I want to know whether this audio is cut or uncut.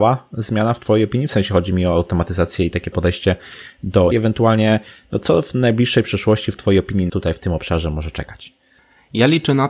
cut